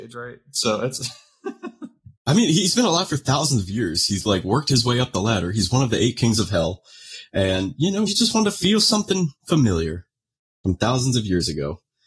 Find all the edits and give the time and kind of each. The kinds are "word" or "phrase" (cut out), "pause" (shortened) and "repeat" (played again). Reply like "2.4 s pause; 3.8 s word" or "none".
2.2 s pause; 4.3 s word; 8.1 s word; 9.4 s pause